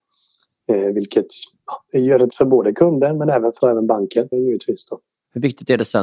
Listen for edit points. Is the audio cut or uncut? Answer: cut